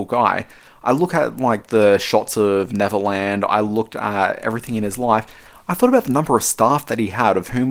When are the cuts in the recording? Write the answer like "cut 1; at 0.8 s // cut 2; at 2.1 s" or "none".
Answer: none

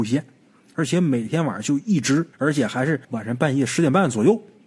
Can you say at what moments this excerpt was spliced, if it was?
cut 1; at 2.3 s // cut 2; at 3.0 s

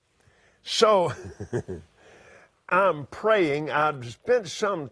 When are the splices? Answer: cut 1; at 2.7 s

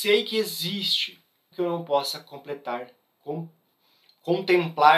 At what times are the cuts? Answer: cut 1; at 1.5 s

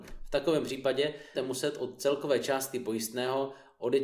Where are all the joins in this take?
cut 1; at 1.3 s

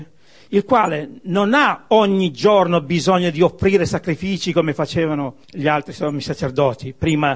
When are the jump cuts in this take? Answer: cut 1; at 5.4 s

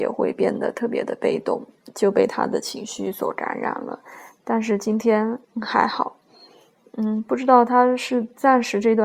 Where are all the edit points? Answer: cut 1; at 5.4 s

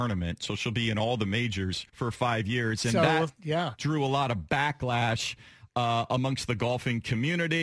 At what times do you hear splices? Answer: cut 1; at 1.9 s

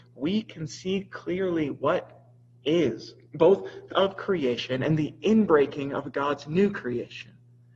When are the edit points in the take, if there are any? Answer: cut 1; at 3.9 s

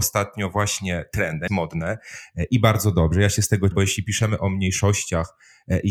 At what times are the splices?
cut 1; at 1.5 s // cut 2; at 3.7 s

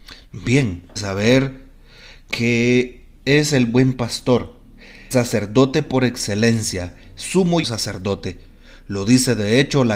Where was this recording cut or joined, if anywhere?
cut 1; at 1.0 s // cut 2; at 3.2 s // cut 3; at 5.1 s // cut 4; at 7.6 s

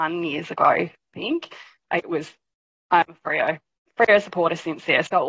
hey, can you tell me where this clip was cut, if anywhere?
none

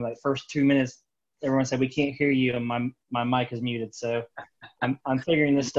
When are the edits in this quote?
none

